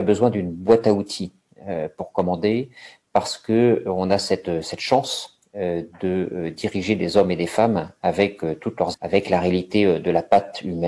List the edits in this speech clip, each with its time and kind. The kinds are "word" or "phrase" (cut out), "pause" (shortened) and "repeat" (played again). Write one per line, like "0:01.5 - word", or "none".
0:08.9 - word